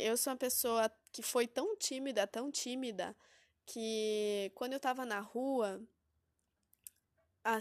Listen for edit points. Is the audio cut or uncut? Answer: uncut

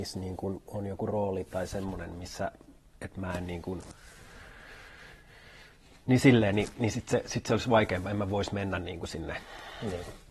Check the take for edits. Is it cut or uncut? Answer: uncut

